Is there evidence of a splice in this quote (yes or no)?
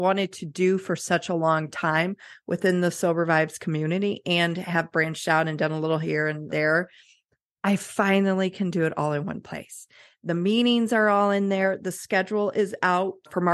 yes